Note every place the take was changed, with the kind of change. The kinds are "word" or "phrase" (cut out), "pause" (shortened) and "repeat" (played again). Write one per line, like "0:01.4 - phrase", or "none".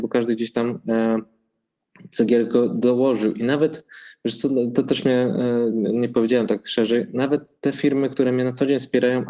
0:07.6 - pause